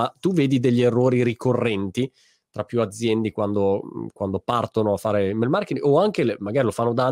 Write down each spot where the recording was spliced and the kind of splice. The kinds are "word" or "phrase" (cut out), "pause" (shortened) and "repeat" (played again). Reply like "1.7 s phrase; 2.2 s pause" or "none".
none